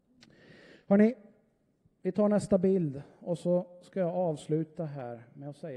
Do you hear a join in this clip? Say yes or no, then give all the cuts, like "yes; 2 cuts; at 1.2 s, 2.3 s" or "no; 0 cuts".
no; 0 cuts